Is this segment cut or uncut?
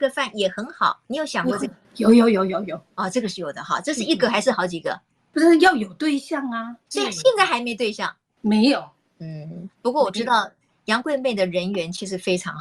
uncut